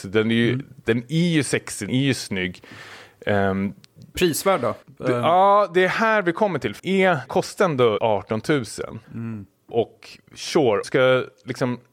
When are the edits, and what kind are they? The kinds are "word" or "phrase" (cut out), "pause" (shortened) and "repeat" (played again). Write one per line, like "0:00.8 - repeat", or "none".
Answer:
0:01.9 - word
0:04.1 - phrase
0:04.8 - pause
0:06.8 - word
0:07.3 - word
0:08.0 - word
0:09.0 - pause
0:10.8 - phrase